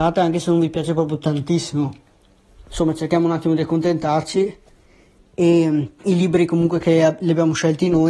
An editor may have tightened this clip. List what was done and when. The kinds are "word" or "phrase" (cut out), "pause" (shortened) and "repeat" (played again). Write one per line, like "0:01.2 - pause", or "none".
0:06.0 - pause